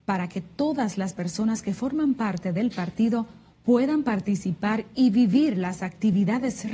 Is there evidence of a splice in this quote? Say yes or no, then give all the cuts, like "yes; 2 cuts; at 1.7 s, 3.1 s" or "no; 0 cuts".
no; 0 cuts